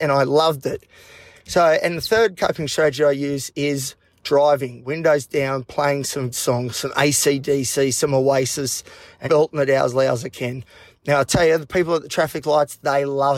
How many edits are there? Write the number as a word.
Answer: two